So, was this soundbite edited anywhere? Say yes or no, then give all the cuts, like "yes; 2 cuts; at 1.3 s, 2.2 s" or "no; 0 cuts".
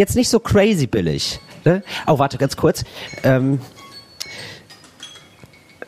no; 0 cuts